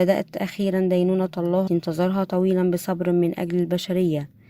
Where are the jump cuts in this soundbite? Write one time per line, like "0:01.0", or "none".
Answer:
0:01.7